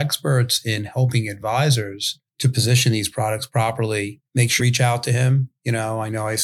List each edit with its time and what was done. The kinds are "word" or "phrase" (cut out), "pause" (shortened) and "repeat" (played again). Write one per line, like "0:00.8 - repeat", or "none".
0:02.3 - pause
0:04.3 - pause
0:04.6 - word